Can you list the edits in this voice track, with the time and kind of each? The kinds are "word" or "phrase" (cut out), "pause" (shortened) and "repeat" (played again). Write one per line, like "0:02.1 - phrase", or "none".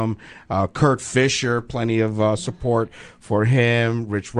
none